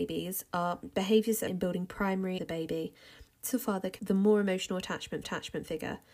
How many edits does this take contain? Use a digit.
5